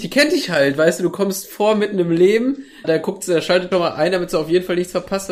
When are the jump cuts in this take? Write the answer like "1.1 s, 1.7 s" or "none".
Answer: 2.8 s, 3.7 s